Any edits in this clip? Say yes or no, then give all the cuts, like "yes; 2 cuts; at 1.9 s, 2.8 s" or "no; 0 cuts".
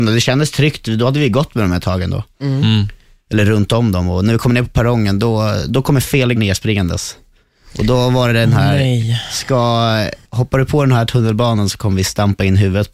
yes; 2 cuts; at 6.4 s, 10.2 s